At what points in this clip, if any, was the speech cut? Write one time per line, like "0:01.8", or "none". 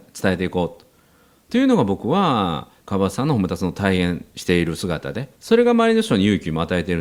0:02.8
0:04.3
0:05.3